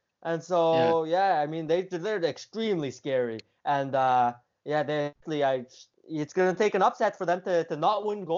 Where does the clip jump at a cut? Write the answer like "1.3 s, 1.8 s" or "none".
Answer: 5.2 s, 5.9 s